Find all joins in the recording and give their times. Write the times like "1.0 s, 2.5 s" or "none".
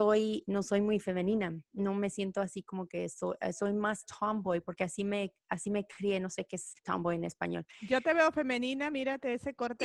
6.8 s